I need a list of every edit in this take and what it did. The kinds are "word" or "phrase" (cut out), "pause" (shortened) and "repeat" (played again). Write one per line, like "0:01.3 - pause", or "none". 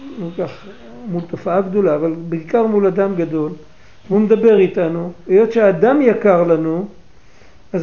none